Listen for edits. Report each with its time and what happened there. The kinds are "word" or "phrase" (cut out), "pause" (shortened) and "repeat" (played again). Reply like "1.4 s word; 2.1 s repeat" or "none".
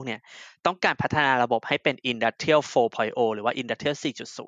none